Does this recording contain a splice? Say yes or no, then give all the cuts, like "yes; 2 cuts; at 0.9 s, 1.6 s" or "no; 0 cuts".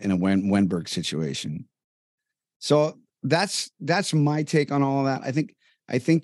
no; 0 cuts